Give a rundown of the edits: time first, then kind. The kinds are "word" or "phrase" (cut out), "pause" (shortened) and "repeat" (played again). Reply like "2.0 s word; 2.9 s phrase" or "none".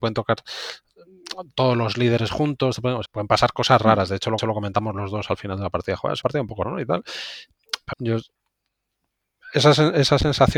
3.1 s word; 4.4 s repeat; 6.2 s word; 6.6 s word; 7.9 s word